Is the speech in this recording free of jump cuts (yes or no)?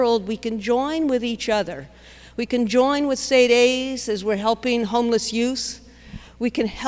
yes